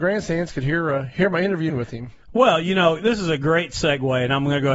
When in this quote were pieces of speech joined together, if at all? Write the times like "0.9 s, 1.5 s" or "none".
1.7 s, 2.2 s